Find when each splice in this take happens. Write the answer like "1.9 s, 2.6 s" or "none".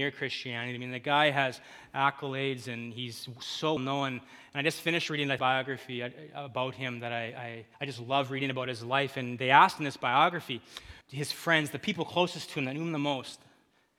3.8 s, 5.4 s, 7.7 s, 11.0 s